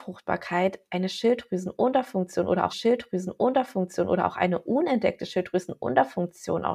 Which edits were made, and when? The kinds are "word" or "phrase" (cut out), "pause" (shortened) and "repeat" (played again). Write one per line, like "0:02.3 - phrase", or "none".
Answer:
0:02.7 - repeat